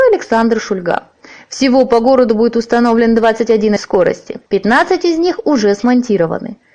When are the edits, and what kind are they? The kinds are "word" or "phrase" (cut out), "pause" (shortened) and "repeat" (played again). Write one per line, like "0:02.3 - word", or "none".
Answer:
0:03.8 - word
0:04.5 - pause